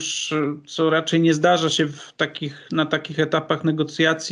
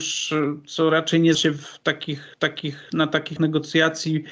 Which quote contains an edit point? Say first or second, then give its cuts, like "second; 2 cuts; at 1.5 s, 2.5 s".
second; 3 cuts; at 1.3 s, 2.3 s, 3.4 s